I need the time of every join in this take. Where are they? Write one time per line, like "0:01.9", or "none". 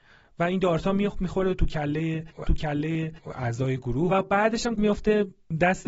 0:02.5
0:04.1
0:04.8